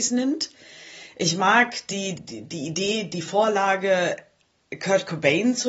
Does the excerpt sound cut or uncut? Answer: cut